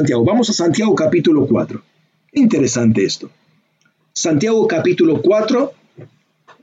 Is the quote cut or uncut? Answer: cut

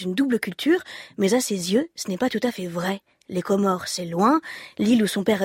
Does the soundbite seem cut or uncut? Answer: uncut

